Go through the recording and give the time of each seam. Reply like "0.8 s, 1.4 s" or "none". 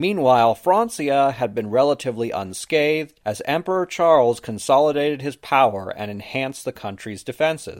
3.2 s